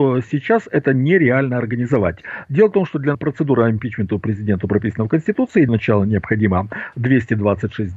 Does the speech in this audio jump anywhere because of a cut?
yes; 2 cuts; at 3.1 s, 5.7 s

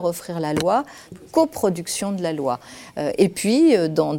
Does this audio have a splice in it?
yes; 1 cut; at 1.1 s

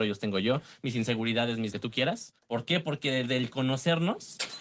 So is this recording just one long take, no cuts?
no; 2 cuts; at 1.7 s, 2.4 s

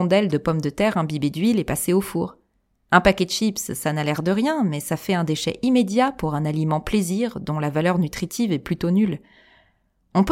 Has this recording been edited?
no; 0 cuts

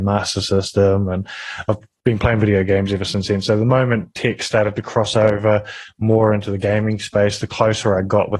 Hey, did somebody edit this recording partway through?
no; 0 cuts

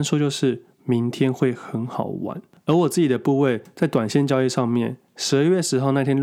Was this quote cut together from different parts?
no; 0 cuts

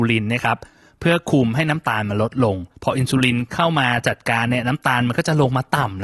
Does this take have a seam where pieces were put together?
yes; 1 cut; at 2.7 s

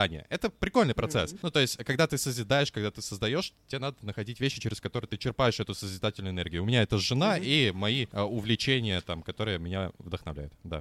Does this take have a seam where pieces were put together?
no; 0 cuts

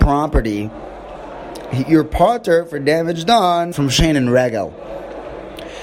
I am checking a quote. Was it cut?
yes; 1 cut; at 3.7 s

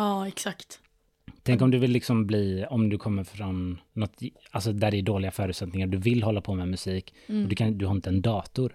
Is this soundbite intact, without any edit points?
no; 1 cut; at 3.9 s

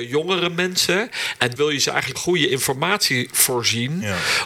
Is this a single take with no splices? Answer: no; 2 cuts; at 1.6 s, 2.1 s

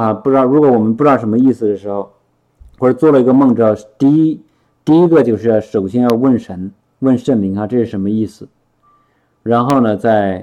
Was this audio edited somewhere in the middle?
no; 0 cuts

